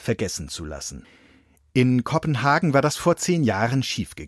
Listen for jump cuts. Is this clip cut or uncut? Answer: uncut